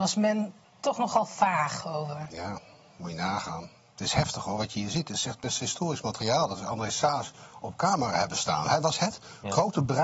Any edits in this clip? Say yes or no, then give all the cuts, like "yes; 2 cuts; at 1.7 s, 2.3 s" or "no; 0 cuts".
no; 0 cuts